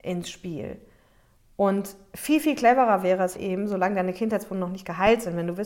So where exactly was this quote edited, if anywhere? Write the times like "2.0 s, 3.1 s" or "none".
3.3 s